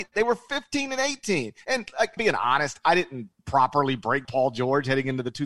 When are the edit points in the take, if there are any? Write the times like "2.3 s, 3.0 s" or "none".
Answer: 1.6 s, 2.2 s, 3.4 s, 4.2 s